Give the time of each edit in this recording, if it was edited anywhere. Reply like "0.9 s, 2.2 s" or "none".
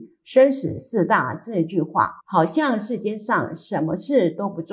2.2 s